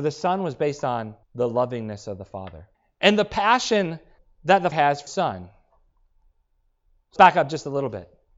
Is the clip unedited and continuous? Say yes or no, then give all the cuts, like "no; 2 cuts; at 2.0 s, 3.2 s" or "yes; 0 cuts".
no; 6 cuts; at 1.2 s, 2.7 s, 4.2 s, 4.7 s, 5.1 s, 7.2 s